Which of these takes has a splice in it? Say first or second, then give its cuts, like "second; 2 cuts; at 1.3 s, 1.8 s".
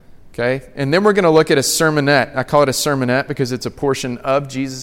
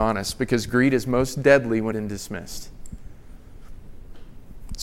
second; 1 cut; at 1.9 s